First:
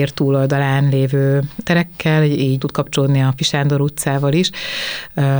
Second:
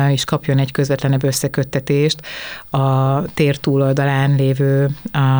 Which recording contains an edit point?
first; 3 cuts; at 1.6 s, 2.6 s, 3.4 s

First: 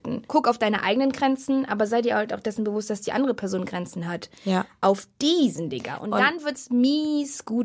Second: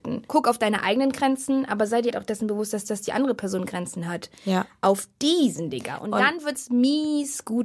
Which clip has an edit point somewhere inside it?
second; 2 cuts; at 2.1 s, 2.9 s

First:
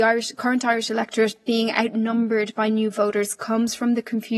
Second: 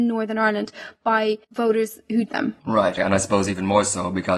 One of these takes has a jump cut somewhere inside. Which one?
second; 3 cuts; at 1.4 s, 2.3 s, 3.0 s

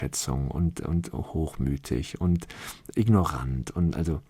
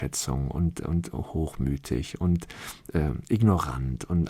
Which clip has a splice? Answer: first; 1 cut; at 2.9 s

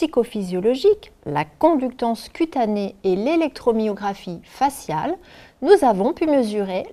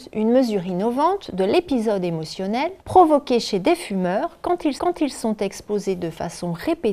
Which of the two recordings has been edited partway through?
second; 2 cuts; at 2.8 s, 4.8 s

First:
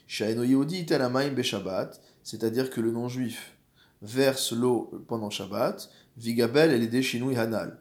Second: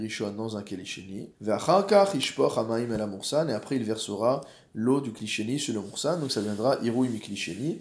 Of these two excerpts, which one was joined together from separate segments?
second; 1 cut; at 1.3 s

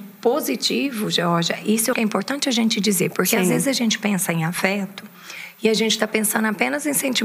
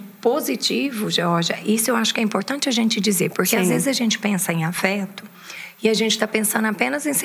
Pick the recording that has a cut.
first; 1 cut; at 1.9 s

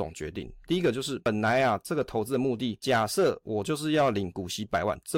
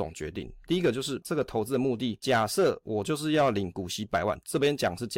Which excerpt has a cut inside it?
second; 1 cut; at 1.2 s

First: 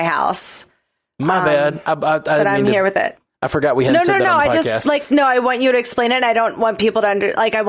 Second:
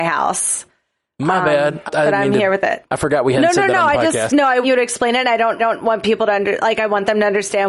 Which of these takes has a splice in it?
second; 5 cuts; at 1.9 s, 2.9 s, 4.3 s, 4.6 s, 5.6 s

